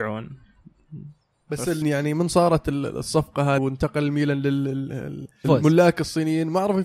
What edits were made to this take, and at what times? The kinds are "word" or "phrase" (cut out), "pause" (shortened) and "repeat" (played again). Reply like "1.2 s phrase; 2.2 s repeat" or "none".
1.8 s word; 3.6 s word; 5.4 s word